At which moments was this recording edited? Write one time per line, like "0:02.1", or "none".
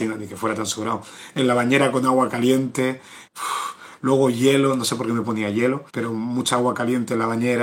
0:03.3
0:05.9

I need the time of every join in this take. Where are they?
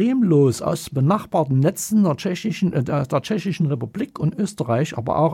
none

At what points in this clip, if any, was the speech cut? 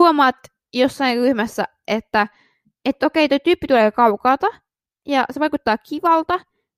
none

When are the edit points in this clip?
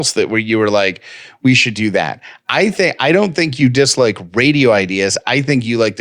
none

